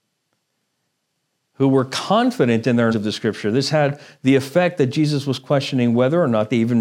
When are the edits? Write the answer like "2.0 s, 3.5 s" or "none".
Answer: 2.9 s